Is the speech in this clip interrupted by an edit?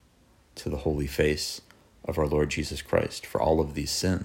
no; 0 cuts

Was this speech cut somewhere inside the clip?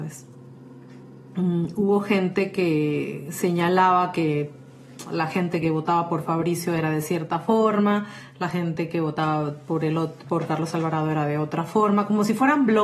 no; 0 cuts

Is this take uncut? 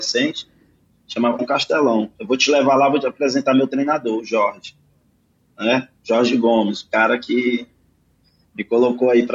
no; 1 cut; at 1.4 s

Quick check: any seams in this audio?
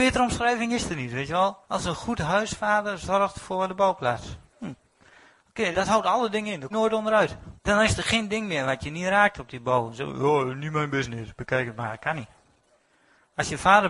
yes; 4 cuts; at 1.6 s, 5.7 s, 6.7 s, 7.6 s

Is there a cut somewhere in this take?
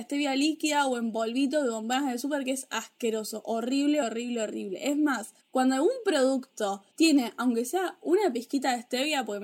yes; 3 cuts; at 4.0 s, 5.4 s, 6.9 s

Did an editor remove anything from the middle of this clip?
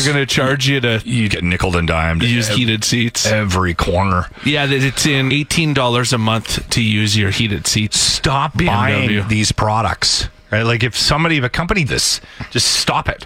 yes; 6 cuts; at 1.3 s, 2.5 s, 5.3 s, 8.5 s, 10.9 s, 11.9 s

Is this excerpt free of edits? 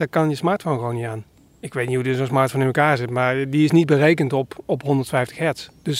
yes; 0 cuts

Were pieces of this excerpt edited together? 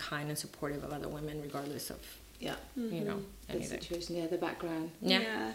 no; 0 cuts

